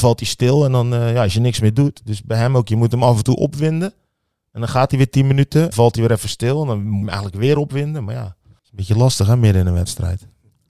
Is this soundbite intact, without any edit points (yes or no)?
no